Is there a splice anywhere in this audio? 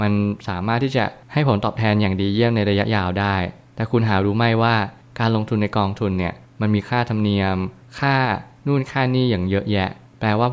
no; 0 cuts

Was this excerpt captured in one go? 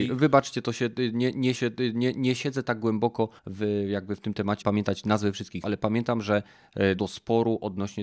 no; 5 cuts; at 1.6 s, 3.4 s, 4.6 s, 5.6 s, 7.0 s

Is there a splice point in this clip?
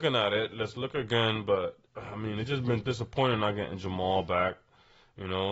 no; 0 cuts

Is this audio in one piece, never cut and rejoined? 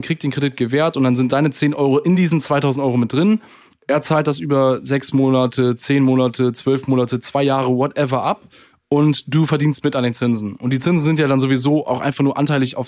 yes; 0 cuts

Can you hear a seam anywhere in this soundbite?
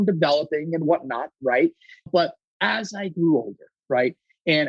yes; 2 cuts; at 2.1 s, 3.8 s

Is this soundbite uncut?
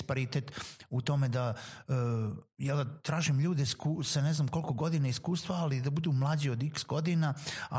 no; 1 cut; at 3.7 s

